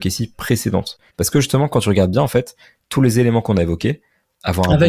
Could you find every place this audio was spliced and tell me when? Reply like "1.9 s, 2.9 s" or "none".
1.1 s